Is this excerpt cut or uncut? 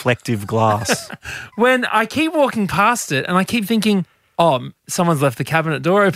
cut